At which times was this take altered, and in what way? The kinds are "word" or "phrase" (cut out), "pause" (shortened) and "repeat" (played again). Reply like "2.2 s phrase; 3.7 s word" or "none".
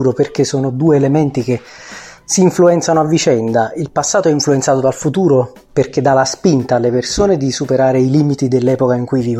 none